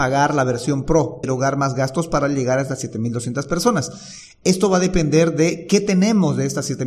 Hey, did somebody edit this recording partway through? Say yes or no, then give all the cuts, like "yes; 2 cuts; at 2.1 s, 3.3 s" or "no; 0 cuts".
yes; 1 cut; at 1.2 s